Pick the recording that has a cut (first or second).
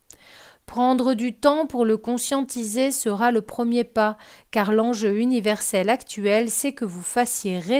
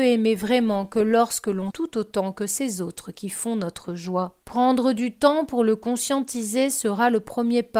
second